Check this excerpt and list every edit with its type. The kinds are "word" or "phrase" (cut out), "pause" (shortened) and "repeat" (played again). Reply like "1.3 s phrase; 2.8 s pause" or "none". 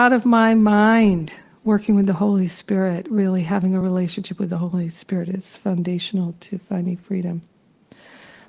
none